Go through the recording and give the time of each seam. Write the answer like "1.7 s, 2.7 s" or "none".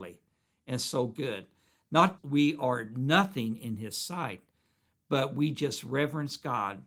2.2 s